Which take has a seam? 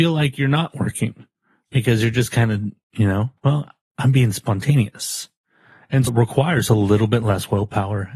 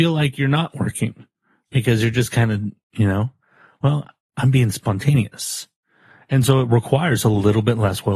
first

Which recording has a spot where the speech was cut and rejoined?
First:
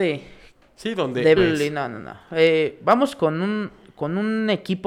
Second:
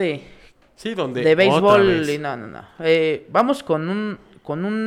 first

